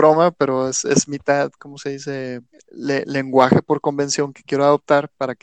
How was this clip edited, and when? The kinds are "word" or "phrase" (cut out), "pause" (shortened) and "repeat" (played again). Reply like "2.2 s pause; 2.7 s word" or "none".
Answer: 2.5 s pause